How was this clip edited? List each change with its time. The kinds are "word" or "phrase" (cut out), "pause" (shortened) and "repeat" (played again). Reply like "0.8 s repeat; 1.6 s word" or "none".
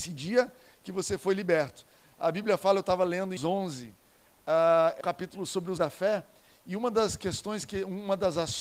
3.4 s word; 5.0 s word; 5.8 s word